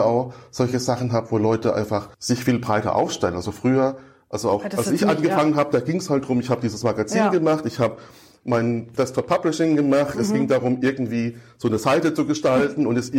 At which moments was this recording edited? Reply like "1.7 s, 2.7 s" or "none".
2.1 s